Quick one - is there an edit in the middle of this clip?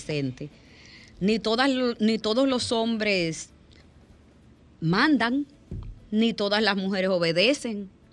no; 0 cuts

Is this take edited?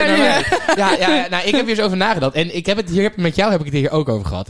yes; 1 cut; at 1.0 s

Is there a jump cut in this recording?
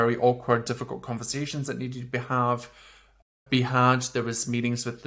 no; 0 cuts

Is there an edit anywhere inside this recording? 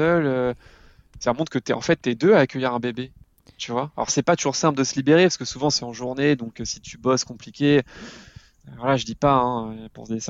no; 0 cuts

